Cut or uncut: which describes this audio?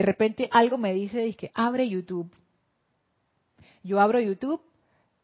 uncut